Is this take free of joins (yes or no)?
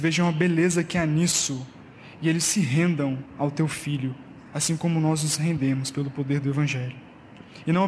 no